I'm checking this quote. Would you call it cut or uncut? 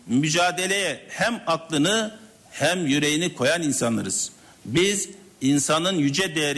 uncut